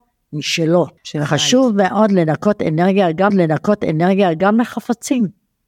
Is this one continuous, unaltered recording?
no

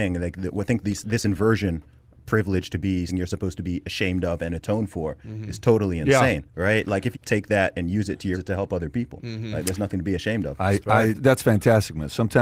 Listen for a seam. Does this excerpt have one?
yes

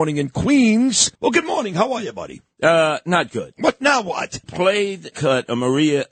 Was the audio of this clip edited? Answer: yes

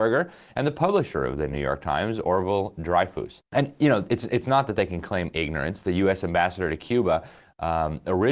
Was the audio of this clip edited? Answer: no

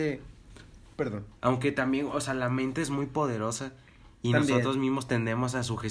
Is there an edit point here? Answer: yes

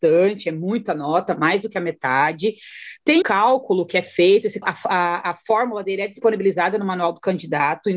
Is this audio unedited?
no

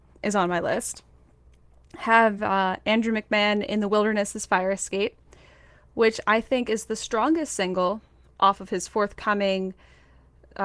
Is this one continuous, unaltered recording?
yes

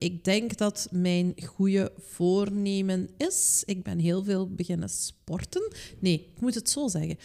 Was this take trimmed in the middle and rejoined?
no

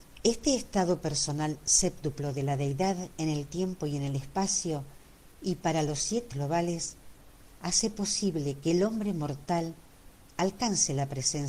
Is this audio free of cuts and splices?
no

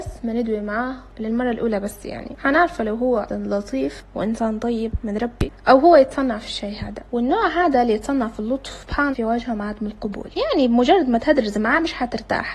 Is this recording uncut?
no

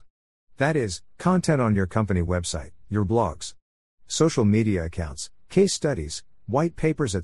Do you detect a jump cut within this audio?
no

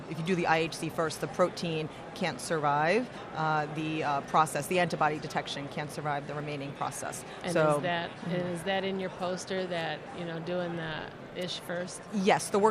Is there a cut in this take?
no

